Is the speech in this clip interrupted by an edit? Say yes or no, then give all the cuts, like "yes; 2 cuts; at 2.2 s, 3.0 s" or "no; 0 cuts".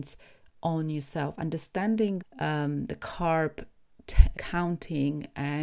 yes; 2 cuts; at 2.2 s, 4.3 s